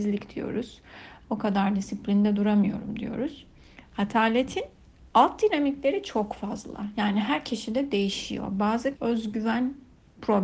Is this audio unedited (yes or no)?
no